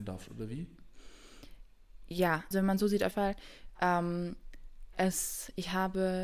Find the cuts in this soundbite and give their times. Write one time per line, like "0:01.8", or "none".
0:02.5
0:03.1